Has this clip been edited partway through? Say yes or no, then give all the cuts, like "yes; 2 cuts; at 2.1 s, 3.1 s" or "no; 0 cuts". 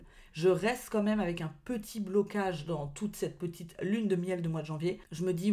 no; 0 cuts